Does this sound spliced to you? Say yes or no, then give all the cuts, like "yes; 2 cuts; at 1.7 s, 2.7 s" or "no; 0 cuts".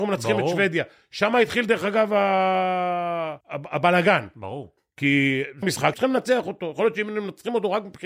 yes; 3 cuts; at 3.4 s, 5.6 s, 5.9 s